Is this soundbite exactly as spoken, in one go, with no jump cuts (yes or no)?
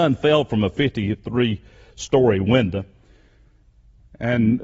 yes